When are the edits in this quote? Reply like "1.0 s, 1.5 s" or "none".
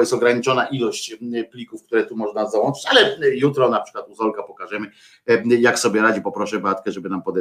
none